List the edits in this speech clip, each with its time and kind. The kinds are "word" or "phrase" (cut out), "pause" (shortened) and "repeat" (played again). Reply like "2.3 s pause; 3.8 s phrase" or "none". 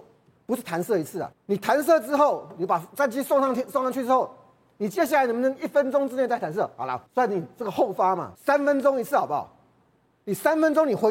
1.3 s pause; 7.1 s pause; 8.4 s pause